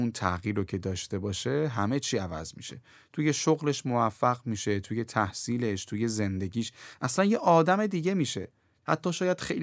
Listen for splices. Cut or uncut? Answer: uncut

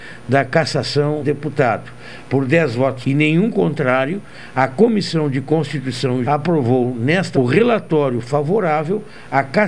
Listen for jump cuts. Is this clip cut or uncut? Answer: cut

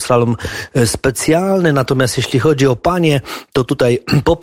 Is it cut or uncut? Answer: uncut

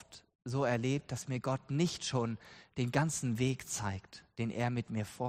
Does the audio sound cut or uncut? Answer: uncut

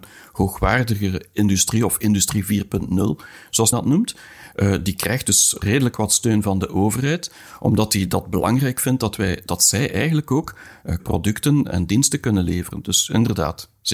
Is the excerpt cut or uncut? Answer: cut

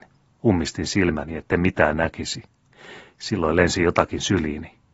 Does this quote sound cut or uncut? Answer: uncut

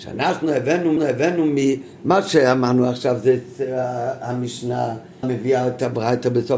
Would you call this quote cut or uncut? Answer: cut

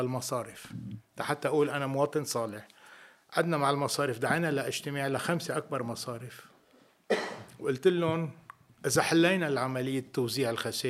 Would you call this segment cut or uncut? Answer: uncut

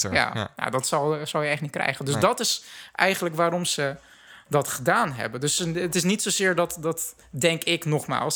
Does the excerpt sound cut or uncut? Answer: uncut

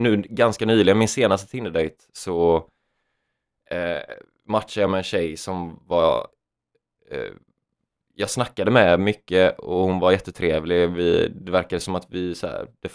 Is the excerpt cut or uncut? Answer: uncut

